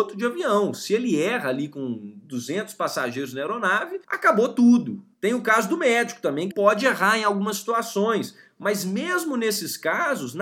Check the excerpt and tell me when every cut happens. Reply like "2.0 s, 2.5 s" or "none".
4.0 s, 5.1 s, 6.5 s